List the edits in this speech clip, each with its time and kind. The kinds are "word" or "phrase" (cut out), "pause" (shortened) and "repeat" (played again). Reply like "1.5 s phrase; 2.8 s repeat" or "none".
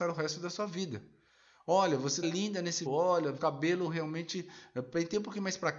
2.2 s word; 2.9 s word; 3.4 s word